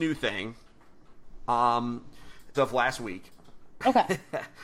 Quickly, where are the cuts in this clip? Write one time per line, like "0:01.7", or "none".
0:02.5